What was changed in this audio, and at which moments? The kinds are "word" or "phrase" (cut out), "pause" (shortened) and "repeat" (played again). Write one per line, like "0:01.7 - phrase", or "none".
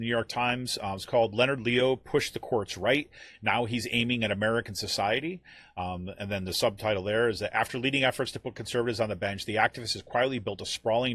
none